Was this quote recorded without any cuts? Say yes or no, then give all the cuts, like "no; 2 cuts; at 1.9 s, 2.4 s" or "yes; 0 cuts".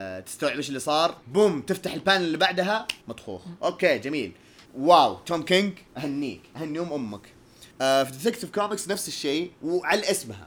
no; 6 cuts; at 1.2 s, 3.0 s, 4.7 s, 5.9 s, 7.7 s, 9.6 s